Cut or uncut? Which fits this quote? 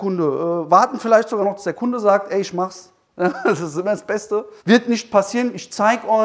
cut